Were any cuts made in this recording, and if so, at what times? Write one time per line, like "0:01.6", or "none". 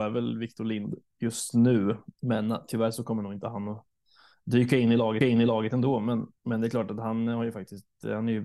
0:02.1
0:05.2
0:06.4

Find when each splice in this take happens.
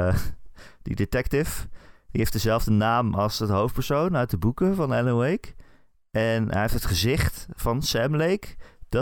none

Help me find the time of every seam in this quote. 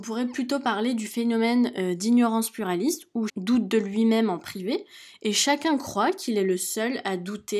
0:03.3

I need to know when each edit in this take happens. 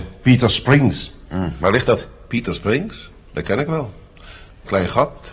none

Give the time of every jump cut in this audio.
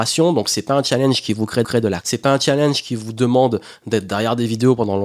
0:01.6
0:02.0

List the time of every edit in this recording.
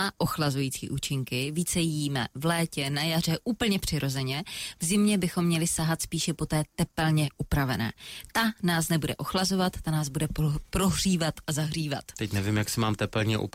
none

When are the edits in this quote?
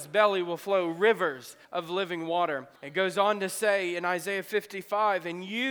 0:01.6
0:02.8

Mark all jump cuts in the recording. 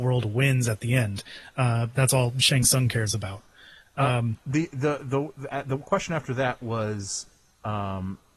none

